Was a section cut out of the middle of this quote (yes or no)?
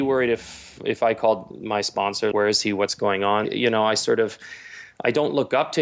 yes